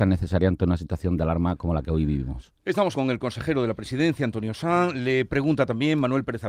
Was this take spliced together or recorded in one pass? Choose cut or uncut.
cut